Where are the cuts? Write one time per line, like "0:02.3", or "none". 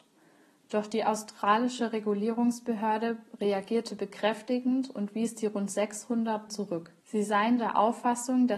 0:06.5
0:07.0